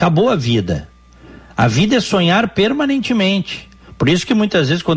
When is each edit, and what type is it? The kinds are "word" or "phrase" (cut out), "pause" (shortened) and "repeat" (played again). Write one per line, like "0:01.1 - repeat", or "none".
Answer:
none